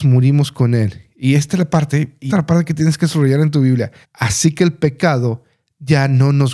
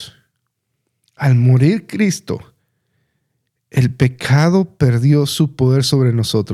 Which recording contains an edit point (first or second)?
first